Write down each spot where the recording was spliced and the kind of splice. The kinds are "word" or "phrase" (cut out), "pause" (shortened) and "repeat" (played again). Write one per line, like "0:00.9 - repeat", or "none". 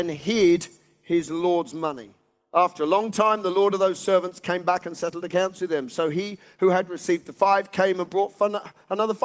none